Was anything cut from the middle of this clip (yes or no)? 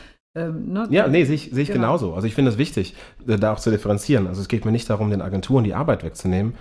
no